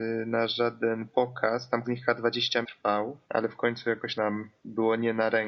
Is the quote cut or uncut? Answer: cut